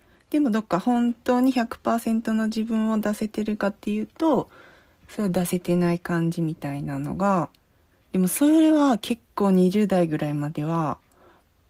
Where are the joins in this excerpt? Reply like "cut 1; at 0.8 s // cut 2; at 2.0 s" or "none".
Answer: none